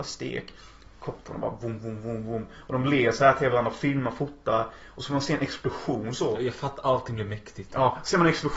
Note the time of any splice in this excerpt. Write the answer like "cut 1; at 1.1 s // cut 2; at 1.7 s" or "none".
none